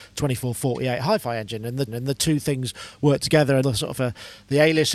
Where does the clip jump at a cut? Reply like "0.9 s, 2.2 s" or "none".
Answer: 1.9 s, 3.6 s, 3.9 s